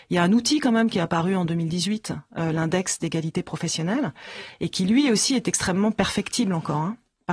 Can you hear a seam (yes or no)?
no